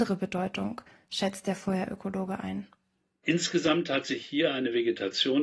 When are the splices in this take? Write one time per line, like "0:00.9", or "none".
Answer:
none

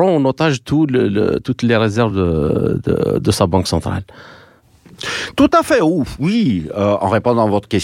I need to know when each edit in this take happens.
none

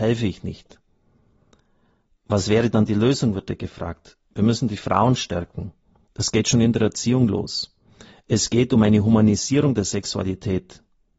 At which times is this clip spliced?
none

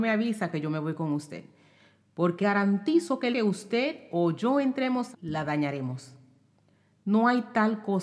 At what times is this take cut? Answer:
0:02.4
0:03.3
0:05.1

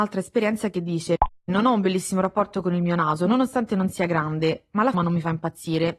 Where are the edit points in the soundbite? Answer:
0:04.9

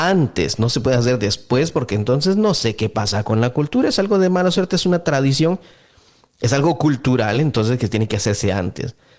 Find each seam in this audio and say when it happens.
none

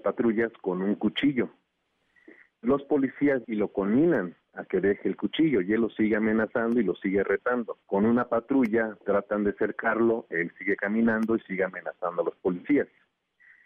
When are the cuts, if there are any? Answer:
0:03.4
0:07.8

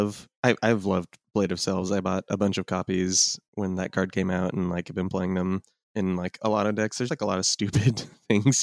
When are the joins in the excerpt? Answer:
0:05.8
0:07.1

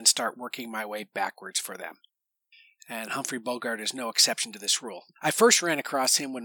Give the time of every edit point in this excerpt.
none

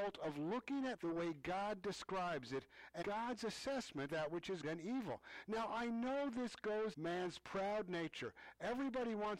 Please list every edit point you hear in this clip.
0:01.0
0:03.0
0:04.1
0:04.6
0:06.9

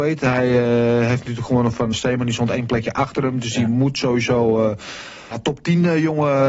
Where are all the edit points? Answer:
0:01.9
0:05.3

